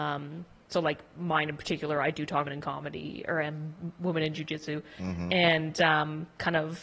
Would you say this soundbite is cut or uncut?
cut